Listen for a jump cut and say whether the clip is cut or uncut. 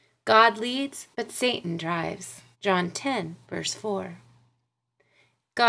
cut